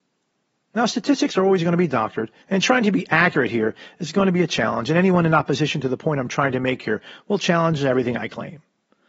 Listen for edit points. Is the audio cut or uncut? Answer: cut